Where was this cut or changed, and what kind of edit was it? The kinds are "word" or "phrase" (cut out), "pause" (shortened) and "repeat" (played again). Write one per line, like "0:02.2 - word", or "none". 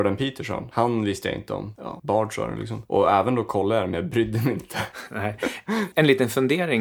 0:01.8 - word